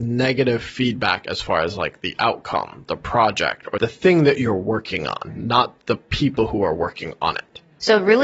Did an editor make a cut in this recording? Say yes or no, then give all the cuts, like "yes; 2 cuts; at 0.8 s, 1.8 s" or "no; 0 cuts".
no; 0 cuts